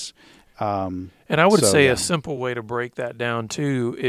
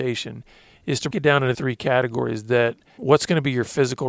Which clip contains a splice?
second; 3 cuts; at 1.1 s, 1.5 s, 3.0 s

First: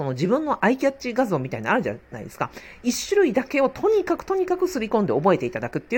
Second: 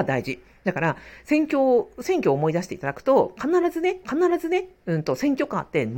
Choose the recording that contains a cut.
second; 1 cut; at 4.0 s

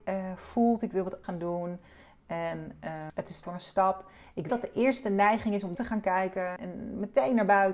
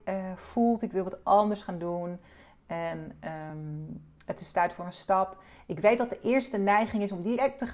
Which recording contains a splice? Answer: first; 6 cuts; at 1.2 s, 3.1 s, 3.4 s, 4.5 s, 5.7 s, 6.6 s

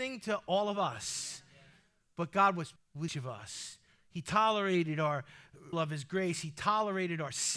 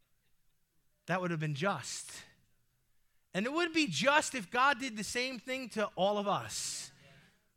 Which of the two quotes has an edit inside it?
first; 3 cuts; at 2.8 s, 3.1 s, 5.7 s

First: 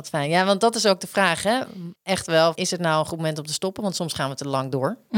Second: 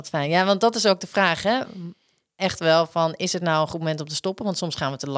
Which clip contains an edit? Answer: first; 2 cuts; at 2.0 s, 2.5 s

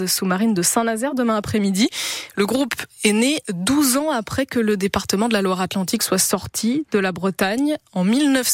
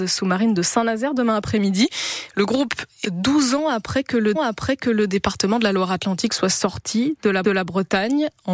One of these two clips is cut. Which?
second; 3 cuts; at 3.0 s, 4.3 s, 7.4 s

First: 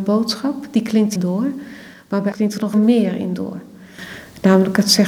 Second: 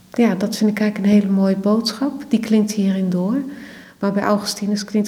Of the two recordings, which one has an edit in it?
first; 3 cuts; at 1.2 s, 2.3 s, 2.7 s

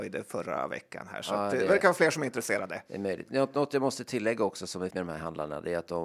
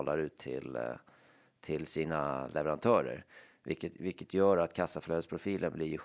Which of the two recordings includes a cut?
first; 1 cut; at 4.9 s

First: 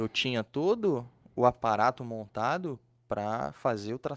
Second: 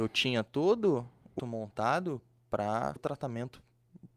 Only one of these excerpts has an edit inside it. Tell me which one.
second; 2 cuts; at 1.4 s, 3.0 s

